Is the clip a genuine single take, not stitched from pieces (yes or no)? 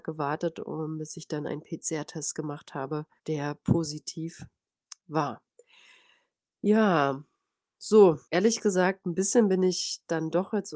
no